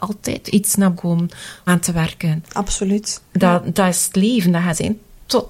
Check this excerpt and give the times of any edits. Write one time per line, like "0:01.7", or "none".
0:01.0
0:01.7